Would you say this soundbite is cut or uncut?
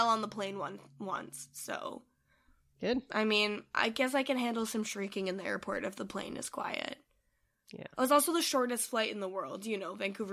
uncut